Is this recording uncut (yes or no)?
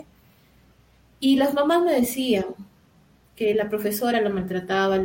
yes